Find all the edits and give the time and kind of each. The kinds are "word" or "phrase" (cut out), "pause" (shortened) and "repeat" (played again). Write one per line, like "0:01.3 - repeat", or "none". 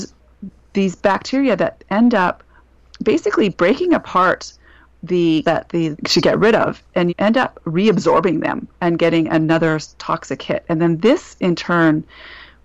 0:05.4 - word
0:05.9 - phrase
0:07.1 - word
0:08.7 - pause